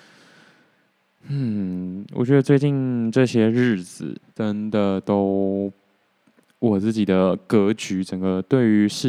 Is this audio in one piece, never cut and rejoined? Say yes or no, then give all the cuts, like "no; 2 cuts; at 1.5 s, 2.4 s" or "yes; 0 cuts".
no; 1 cut; at 4.2 s